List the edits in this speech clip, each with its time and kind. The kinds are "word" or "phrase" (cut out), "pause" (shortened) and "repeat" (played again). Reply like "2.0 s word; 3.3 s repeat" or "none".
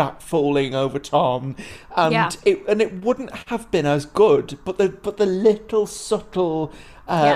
none